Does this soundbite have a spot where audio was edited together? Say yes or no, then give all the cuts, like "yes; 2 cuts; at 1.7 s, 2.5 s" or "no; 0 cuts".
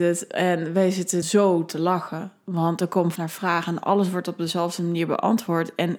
yes; 2 cuts; at 1.2 s, 3.2 s